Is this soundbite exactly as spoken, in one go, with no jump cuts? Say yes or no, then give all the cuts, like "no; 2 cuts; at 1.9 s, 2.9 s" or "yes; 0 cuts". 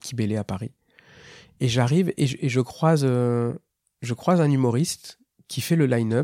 yes; 0 cuts